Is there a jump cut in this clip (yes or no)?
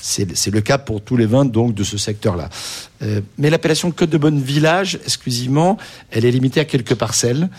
no